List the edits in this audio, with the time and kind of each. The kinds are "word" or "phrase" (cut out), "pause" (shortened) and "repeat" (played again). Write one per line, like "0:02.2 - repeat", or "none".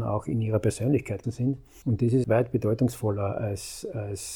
0:01.2 - word
0:02.2 - word